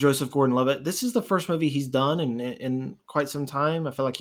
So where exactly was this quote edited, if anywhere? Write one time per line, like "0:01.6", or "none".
none